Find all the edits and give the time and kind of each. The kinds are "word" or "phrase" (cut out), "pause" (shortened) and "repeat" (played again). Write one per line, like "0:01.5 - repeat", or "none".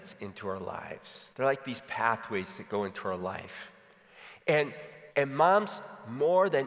0:01.3 - pause
0:05.1 - pause